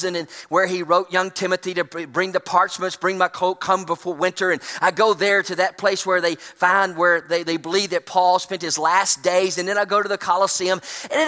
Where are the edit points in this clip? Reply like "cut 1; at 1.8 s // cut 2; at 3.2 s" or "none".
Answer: none